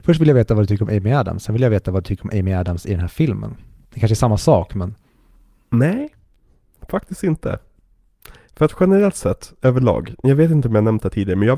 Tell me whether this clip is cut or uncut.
uncut